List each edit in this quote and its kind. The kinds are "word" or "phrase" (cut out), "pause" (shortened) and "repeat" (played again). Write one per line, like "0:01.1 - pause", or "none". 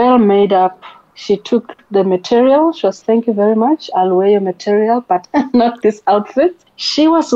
0:03.0 - word
0:05.2 - word